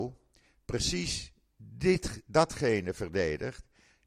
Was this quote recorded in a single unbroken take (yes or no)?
yes